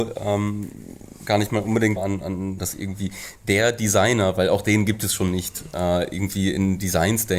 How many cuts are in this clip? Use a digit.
2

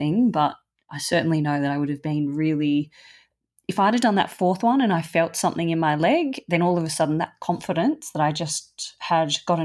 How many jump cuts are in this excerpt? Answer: 0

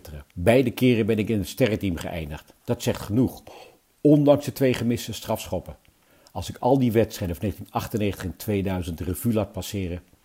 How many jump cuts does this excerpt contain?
0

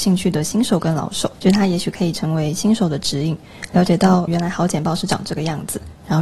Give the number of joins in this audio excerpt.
2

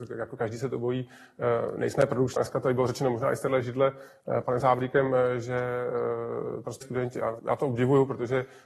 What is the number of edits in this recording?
4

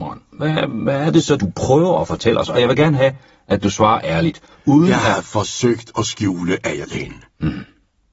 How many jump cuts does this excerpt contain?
2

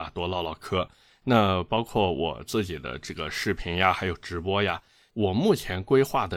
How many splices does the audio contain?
0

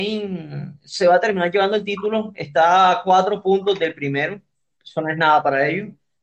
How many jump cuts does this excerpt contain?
1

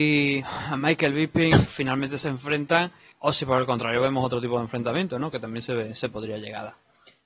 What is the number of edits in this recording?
2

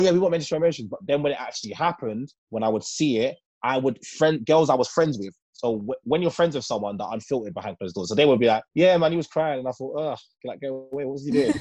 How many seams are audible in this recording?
4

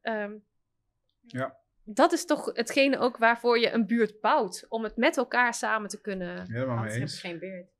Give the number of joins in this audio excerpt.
1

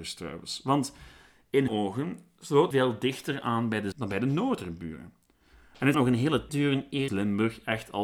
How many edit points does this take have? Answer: 6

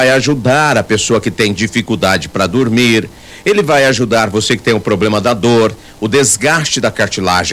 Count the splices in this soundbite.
0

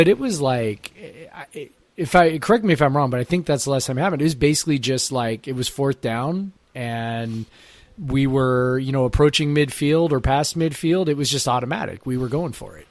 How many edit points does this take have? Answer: 0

